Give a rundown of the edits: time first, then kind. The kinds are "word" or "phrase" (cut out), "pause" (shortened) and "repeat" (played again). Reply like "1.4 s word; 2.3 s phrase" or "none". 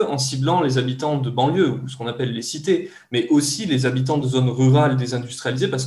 none